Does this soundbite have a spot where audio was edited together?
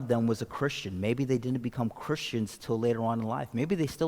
no; 0 cuts

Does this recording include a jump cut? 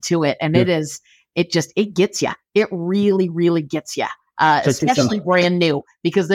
no; 0 cuts

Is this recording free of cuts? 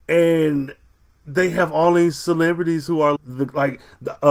no; 1 cut; at 3.2 s

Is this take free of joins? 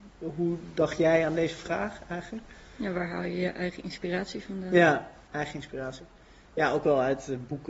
yes; 0 cuts

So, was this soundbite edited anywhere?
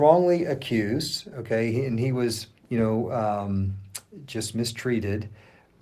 yes; 1 cut; at 2.6 s

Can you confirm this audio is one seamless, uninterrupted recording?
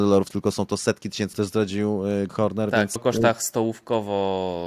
no; 3 cuts; at 1.3 s, 2.3 s, 3.0 s

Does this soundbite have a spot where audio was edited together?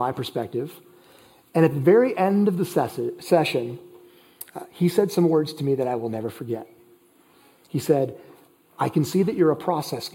no; 0 cuts

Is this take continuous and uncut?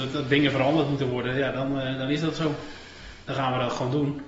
yes; 0 cuts

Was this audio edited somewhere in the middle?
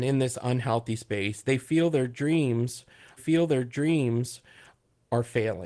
yes; 1 cut; at 3.2 s

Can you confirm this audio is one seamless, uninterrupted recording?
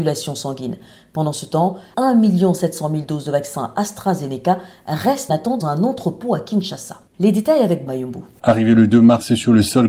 no; 5 cuts; at 1.9 s, 5.3 s, 5.6 s, 7.1 s, 7.9 s

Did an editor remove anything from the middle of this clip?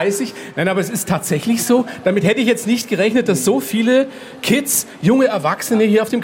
no; 0 cuts

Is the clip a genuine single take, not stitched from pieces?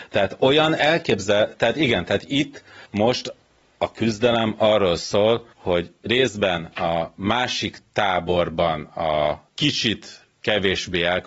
no; 3 cuts; at 2.8 s, 5.5 s, 9.5 s

